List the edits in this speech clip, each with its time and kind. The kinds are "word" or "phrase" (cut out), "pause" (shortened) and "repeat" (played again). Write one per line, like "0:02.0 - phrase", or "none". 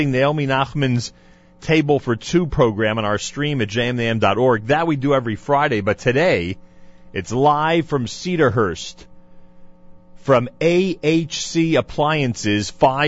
none